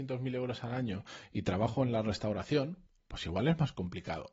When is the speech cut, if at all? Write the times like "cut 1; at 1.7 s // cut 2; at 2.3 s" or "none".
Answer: cut 1; at 2.9 s

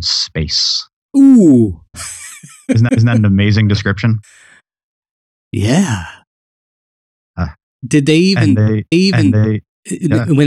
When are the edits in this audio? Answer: cut 1; at 1.0 s // cut 2; at 2.9 s // cut 3; at 8.9 s

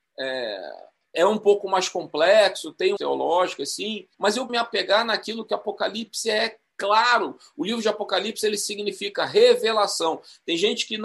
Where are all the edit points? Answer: cut 1; at 1.1 s // cut 2; at 3.0 s // cut 3; at 4.1 s // cut 4; at 4.5 s

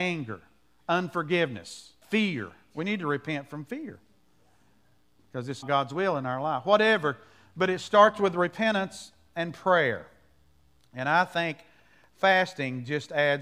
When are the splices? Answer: cut 1; at 2.0 s // cut 2; at 5.6 s

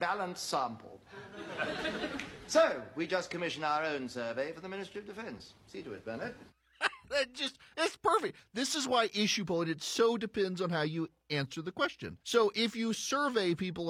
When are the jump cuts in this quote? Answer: cut 1; at 12.2 s

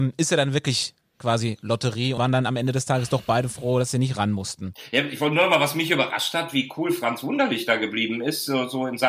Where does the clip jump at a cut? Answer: cut 1; at 2.2 s

